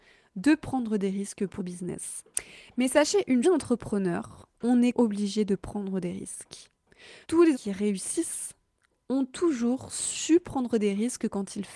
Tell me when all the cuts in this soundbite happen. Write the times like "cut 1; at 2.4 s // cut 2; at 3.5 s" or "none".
cut 1; at 1.6 s // cut 2; at 3.4 s // cut 3; at 4.5 s // cut 4; at 4.9 s // cut 5; at 7.2 s // cut 6; at 7.5 s